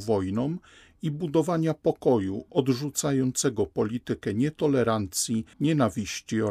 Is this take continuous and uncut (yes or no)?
no